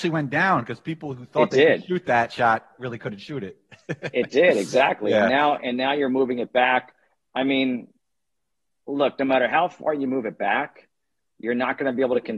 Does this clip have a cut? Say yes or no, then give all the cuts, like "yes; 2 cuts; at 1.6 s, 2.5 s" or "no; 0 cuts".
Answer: no; 0 cuts